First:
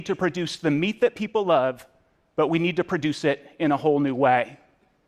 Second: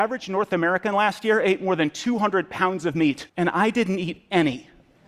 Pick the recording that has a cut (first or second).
second